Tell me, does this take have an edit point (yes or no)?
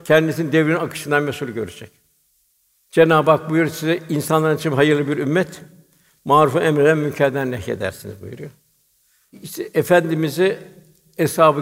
no